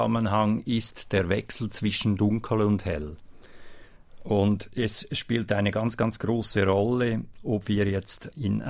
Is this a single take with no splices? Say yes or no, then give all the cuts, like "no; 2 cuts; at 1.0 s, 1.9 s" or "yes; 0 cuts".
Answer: yes; 0 cuts